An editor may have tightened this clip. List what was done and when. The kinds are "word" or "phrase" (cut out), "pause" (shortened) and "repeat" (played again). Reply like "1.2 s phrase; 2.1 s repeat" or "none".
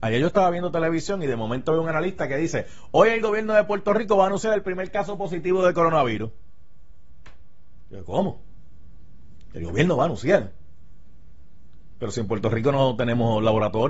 none